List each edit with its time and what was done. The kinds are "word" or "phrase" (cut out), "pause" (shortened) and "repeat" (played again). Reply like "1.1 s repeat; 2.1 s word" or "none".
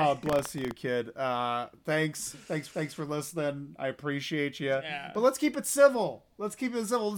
2.7 s repeat